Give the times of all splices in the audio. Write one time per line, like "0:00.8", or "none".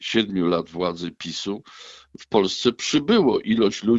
none